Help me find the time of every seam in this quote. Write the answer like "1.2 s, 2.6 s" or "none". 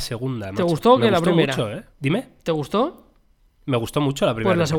1.9 s